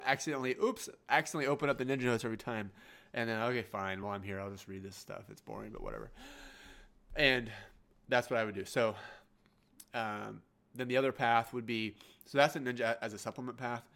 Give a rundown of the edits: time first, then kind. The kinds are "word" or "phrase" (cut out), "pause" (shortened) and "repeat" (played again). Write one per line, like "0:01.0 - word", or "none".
none

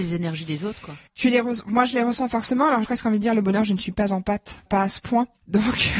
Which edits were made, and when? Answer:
0:01.1 - pause
0:02.8 - phrase
0:04.7 - word

